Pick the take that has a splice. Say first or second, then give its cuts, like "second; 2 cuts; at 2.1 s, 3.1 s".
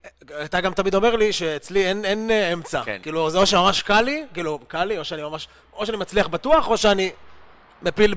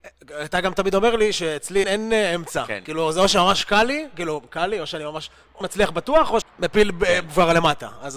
second; 3 cuts; at 1.8 s, 5.6 s, 6.4 s